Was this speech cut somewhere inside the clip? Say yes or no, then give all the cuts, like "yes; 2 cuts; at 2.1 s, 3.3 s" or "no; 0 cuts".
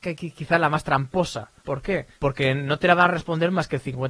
yes; 2 cuts; at 1.6 s, 2.1 s